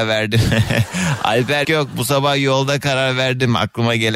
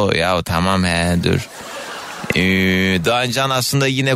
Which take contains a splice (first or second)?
first